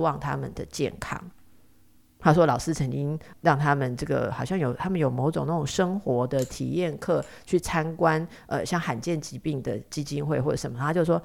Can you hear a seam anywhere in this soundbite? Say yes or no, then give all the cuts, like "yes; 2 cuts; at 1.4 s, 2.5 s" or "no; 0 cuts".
no; 0 cuts